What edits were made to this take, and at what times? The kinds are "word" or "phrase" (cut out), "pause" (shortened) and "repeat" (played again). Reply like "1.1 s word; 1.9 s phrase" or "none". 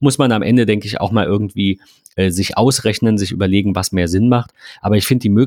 none